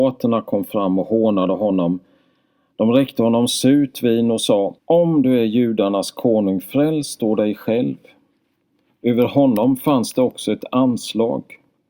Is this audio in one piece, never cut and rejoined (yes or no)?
no